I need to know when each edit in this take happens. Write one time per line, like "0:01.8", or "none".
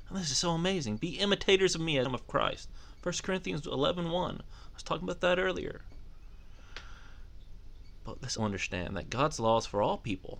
0:02.1
0:08.4